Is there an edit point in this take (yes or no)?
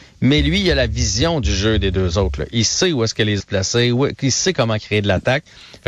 yes